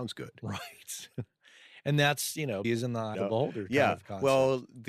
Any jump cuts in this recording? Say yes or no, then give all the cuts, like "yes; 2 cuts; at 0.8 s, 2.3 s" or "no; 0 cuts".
yes; 2 cuts; at 2.6 s, 3.1 s